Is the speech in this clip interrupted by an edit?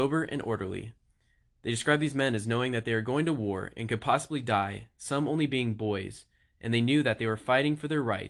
no; 0 cuts

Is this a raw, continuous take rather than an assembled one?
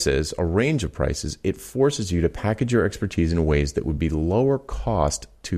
yes; 0 cuts

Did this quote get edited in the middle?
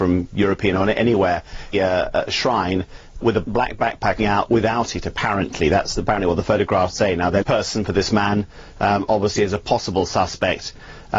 yes; 3 cuts; at 1.7 s, 4.2 s, 7.4 s

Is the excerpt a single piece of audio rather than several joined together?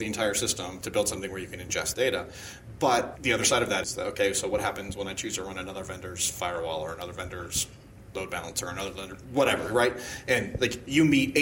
no; 3 cuts; at 1.9 s, 3.2 s, 3.8 s

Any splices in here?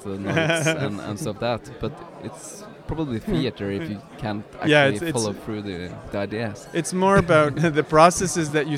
yes; 1 cut; at 1.3 s

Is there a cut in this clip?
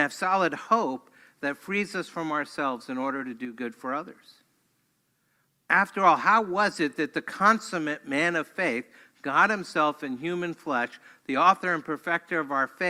no; 0 cuts

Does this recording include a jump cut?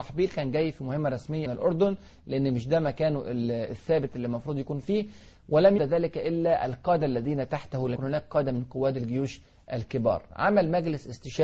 yes; 3 cuts; at 1.5 s, 5.8 s, 8.0 s

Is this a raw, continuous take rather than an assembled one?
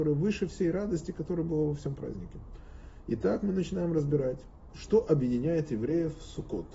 yes; 0 cuts

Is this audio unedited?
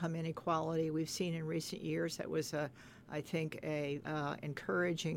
no; 1 cut; at 4.0 s

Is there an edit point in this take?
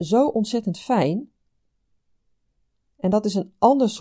no; 0 cuts

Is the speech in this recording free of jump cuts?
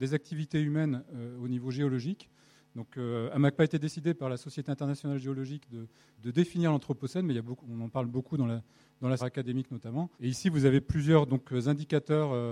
no; 4 cuts; at 3.5 s, 6.2 s, 9.2 s, 10.1 s

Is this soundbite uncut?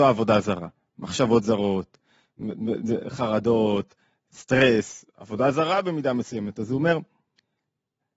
yes; 0 cuts

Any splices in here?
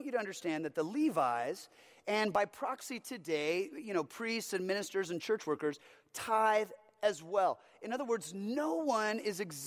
no; 0 cuts

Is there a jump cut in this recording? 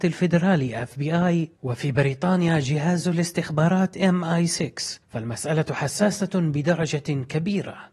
no; 0 cuts

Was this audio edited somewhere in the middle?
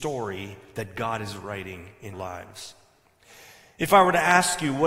yes; 1 cut; at 2.1 s

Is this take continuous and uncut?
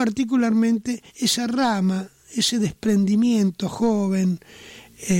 no; 1 cut; at 1.1 s

